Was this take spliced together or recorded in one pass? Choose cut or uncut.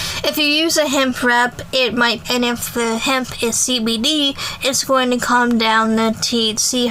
cut